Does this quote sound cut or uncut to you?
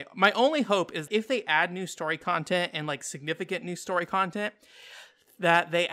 cut